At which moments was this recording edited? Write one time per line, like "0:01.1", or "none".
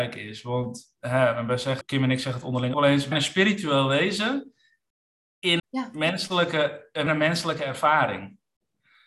0:01.0
0:01.8
0:02.7
0:03.1
0:05.6
0:07.1